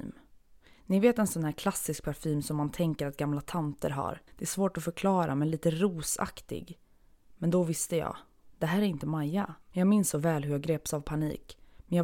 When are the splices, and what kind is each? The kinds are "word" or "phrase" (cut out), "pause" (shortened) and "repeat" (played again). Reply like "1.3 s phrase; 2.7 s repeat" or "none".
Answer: 4.3 s pause; 9.6 s pause